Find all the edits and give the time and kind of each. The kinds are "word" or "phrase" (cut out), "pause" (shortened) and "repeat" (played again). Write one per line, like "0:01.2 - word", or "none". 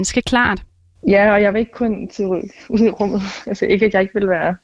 none